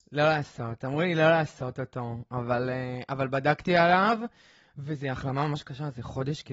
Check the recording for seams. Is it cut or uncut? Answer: uncut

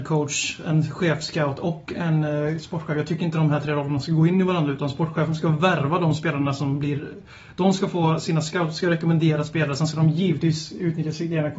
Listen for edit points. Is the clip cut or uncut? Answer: uncut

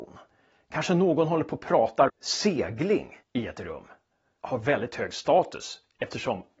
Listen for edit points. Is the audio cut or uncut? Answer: cut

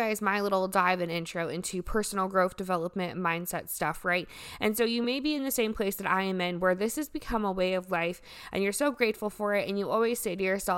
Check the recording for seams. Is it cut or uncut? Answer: uncut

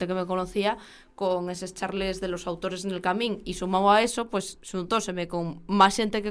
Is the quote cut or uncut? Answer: uncut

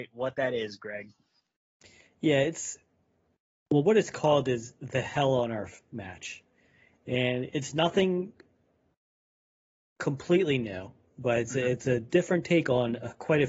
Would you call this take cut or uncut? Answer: uncut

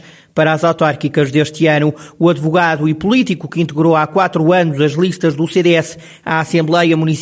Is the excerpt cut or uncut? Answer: uncut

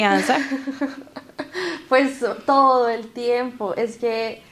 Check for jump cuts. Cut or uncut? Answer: uncut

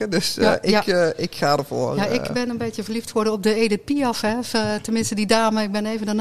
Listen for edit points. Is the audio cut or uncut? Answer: uncut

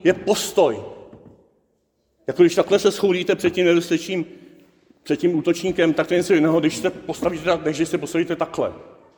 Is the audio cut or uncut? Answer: uncut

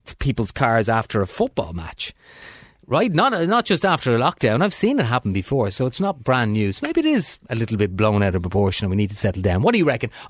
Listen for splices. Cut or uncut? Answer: uncut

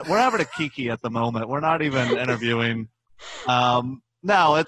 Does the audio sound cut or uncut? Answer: uncut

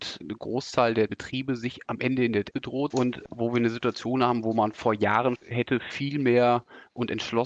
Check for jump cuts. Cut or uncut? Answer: cut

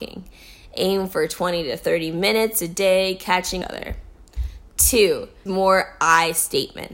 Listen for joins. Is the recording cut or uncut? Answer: cut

